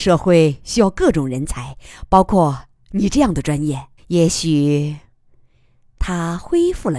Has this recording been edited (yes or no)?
yes